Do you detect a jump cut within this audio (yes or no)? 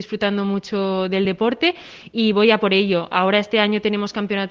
no